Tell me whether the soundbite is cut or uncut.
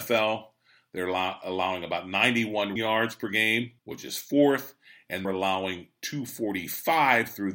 cut